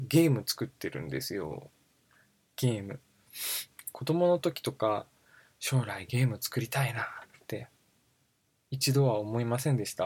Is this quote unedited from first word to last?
yes; 0 cuts

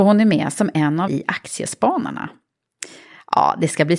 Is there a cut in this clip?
yes; 1 cut; at 1.1 s

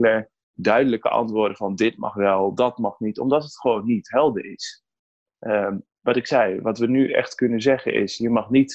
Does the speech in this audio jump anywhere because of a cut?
no; 0 cuts

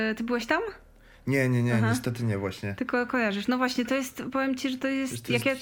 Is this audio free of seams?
yes; 0 cuts

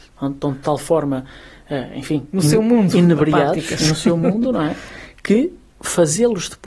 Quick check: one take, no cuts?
no; 1 cut; at 5.7 s

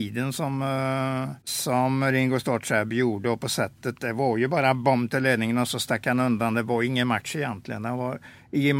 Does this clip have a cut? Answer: yes; 1 cut; at 1.4 s

